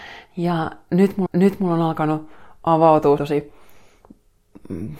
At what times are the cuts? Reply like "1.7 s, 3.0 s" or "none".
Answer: 1.3 s, 3.2 s